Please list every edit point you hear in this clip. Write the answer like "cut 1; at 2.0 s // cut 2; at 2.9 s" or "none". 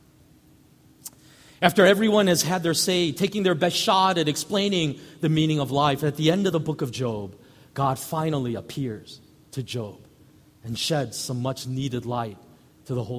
none